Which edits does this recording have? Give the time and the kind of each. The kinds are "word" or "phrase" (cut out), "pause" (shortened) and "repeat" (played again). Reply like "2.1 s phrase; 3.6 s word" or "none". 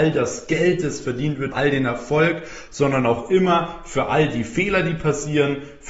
1.5 s word